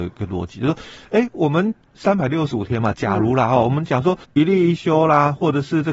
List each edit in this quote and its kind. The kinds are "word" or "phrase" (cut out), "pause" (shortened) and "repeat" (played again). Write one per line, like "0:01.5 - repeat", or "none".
0:04.2 - pause